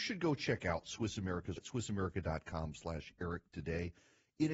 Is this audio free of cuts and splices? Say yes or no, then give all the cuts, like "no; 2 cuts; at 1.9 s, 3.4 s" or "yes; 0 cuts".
no; 1 cut; at 1.6 s